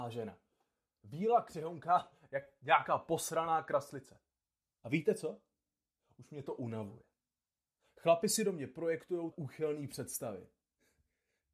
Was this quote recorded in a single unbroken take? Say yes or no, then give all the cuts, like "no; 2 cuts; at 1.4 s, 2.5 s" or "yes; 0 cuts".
no; 1 cut; at 9.3 s